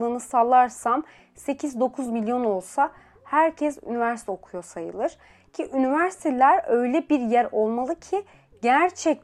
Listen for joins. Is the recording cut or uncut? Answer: uncut